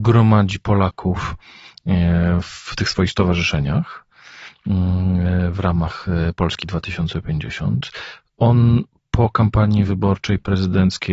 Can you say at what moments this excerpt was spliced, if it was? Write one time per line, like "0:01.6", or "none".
none